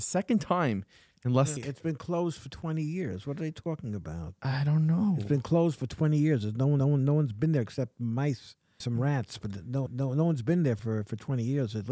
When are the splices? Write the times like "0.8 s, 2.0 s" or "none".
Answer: 1.6 s, 6.8 s, 8.8 s, 9.9 s, 10.8 s